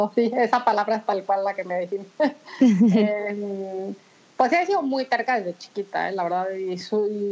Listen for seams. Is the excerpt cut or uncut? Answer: uncut